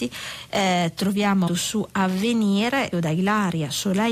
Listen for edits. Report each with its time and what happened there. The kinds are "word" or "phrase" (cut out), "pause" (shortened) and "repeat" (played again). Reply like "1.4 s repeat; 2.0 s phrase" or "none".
1.5 s word; 2.9 s word